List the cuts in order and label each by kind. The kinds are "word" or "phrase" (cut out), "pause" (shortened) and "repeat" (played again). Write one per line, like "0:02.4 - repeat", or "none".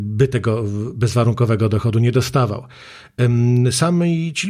none